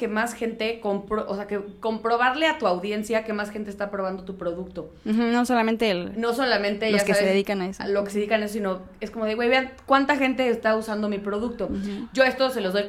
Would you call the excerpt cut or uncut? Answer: uncut